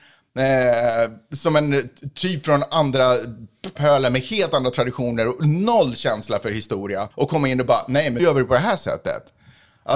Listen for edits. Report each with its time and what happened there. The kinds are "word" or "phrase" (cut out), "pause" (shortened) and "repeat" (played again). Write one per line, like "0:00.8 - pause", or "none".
0:03.8 - word
0:07.1 - pause
0:08.2 - word